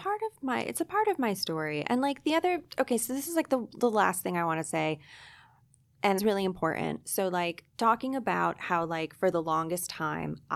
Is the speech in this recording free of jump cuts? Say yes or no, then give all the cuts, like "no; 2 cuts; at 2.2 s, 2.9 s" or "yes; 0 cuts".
no; 2 cuts; at 6.2 s, 7.7 s